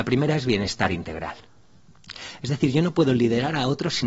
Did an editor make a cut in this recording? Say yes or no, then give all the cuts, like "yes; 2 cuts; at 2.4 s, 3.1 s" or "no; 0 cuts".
no; 0 cuts